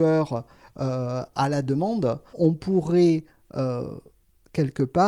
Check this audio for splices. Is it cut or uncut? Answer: cut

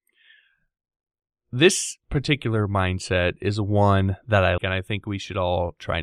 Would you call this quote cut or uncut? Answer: cut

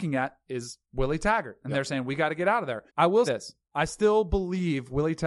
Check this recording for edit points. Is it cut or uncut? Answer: cut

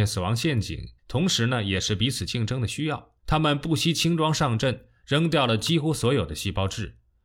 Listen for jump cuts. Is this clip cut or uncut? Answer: cut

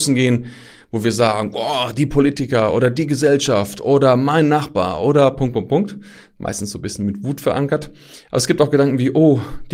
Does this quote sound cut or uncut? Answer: uncut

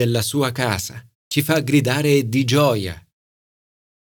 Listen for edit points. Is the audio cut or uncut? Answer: cut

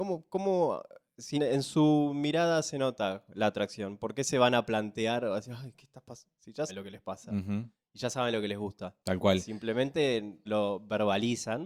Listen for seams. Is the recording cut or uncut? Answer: cut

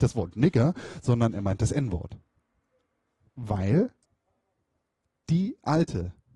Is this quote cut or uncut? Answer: uncut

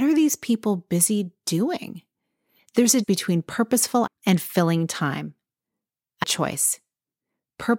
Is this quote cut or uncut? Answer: cut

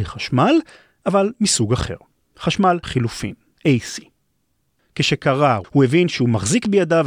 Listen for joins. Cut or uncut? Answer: cut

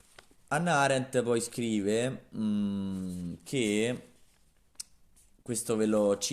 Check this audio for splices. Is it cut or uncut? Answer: uncut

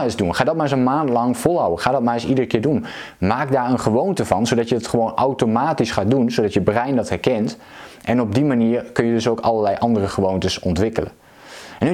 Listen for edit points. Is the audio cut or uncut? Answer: uncut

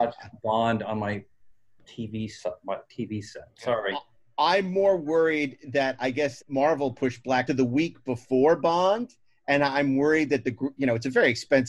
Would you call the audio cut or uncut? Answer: cut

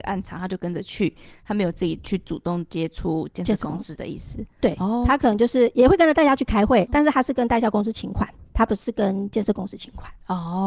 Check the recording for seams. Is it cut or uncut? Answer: cut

